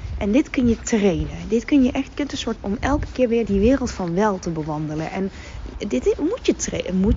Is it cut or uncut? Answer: cut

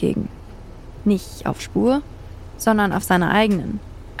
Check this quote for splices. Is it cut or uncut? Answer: cut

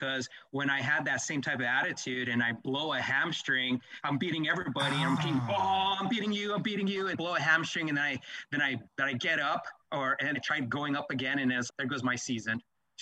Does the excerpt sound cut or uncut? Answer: cut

